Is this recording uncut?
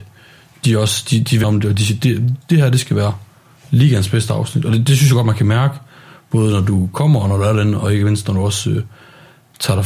no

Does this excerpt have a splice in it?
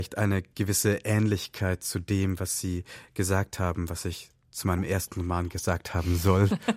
no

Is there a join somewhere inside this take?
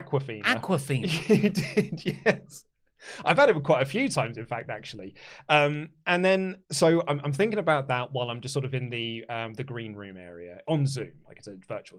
yes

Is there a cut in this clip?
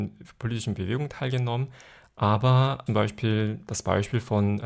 yes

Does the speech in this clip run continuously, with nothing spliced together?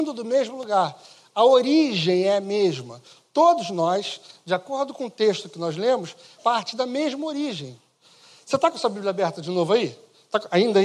no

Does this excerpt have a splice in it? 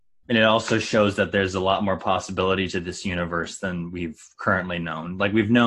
no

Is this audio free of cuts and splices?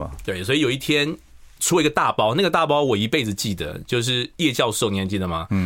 yes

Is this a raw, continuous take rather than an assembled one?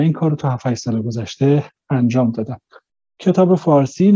yes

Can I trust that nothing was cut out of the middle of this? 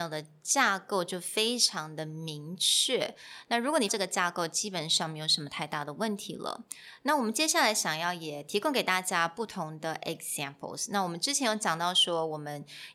no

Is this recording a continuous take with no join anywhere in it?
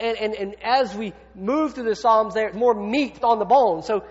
no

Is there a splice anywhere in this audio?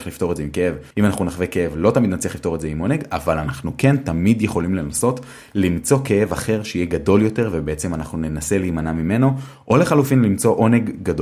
yes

